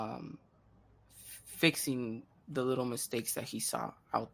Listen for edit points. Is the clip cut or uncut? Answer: uncut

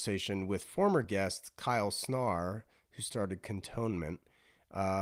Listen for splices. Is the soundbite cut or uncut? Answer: uncut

